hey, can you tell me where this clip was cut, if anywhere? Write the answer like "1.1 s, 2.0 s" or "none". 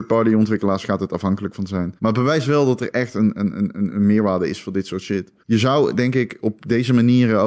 2.0 s, 5.4 s